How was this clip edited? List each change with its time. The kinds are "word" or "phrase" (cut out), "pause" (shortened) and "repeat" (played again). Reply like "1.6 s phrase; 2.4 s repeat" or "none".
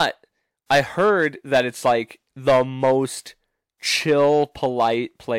none